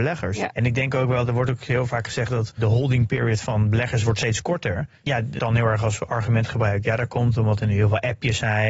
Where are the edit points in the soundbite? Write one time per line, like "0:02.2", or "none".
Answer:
0:05.0
0:05.4

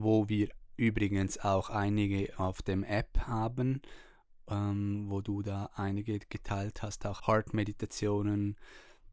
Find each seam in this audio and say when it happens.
0:07.2

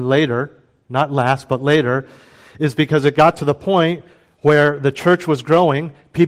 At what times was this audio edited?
none

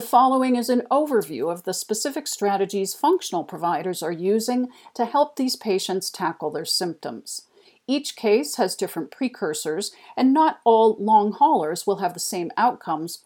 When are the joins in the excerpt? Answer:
none

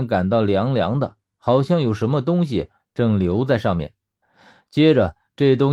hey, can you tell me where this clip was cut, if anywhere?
none

